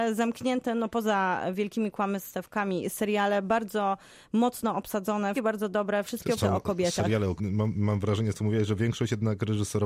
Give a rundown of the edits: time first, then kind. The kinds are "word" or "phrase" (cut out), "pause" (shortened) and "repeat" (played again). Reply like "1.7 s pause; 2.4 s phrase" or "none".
5.4 s word; 6.4 s word; 7.4 s word; 8.3 s word